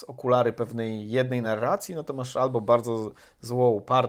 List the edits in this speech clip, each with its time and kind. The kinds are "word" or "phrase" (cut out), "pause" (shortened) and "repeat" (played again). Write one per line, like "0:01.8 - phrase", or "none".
none